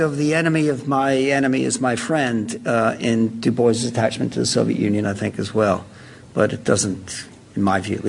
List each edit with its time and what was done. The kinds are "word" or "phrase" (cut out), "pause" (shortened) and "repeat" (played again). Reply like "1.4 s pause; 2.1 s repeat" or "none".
none